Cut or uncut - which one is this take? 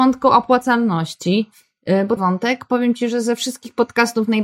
cut